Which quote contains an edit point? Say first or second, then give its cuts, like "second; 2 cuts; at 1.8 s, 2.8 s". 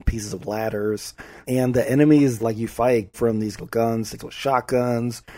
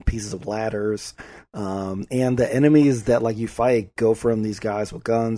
first; 5 cuts; at 1.4 s, 2.4 s, 3.1 s, 3.6 s, 4.2 s